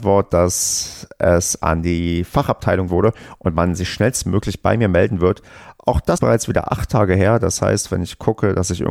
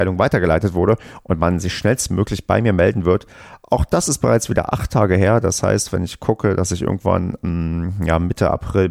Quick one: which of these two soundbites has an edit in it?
first; 2 cuts; at 2.9 s, 6.2 s

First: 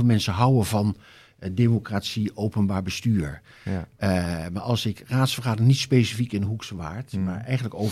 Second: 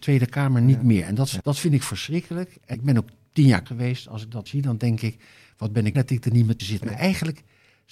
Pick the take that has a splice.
second; 6 cuts; at 1.4 s, 2.7 s, 3.7 s, 4.5 s, 5.9 s, 6.6 s

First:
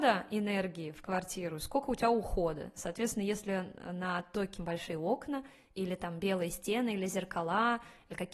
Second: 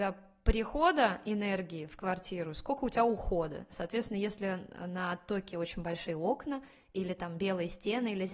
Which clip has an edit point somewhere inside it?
first; 1 cut; at 4.6 s

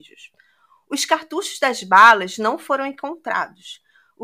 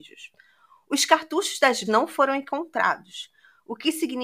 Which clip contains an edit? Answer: second; 1 cut; at 1.8 s

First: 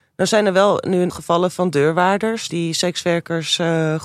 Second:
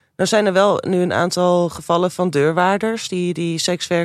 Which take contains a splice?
first; 2 cuts; at 1.1 s, 2.5 s

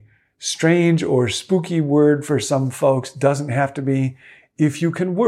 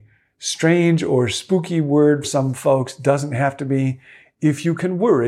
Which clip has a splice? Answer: second; 1 cut; at 2.2 s

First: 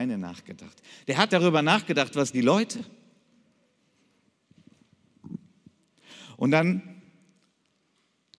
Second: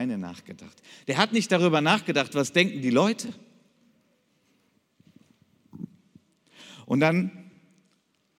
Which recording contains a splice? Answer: first; 2 cuts; at 1.3 s, 2.3 s

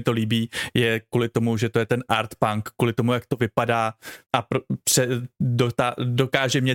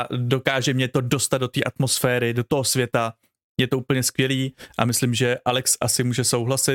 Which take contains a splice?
first; 1 cut; at 4.2 s

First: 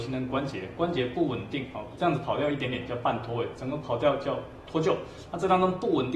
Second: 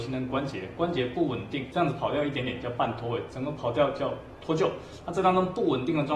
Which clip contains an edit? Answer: second; 1 cut; at 1.7 s

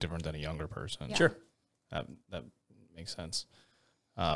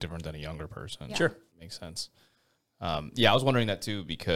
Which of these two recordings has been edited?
second; 1 cut; at 1.5 s

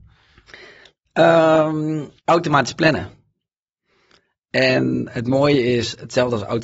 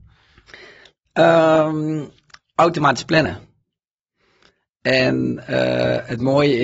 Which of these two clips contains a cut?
first; 2 cuts; at 2.2 s, 5.1 s

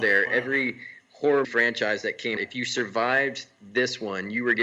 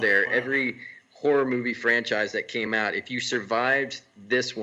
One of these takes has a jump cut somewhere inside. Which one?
first; 2 cuts; at 1.4 s, 2.4 s

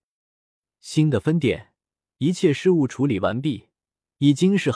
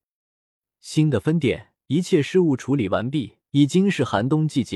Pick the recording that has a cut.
second; 2 cuts; at 1.8 s, 3.5 s

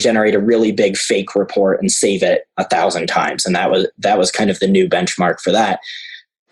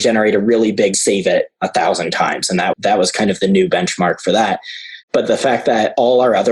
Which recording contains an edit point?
second; 3 cuts; at 0.9 s, 2.7 s, 5.0 s

